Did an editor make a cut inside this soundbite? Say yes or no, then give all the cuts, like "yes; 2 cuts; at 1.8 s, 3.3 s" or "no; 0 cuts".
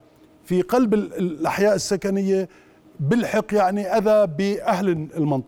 no; 0 cuts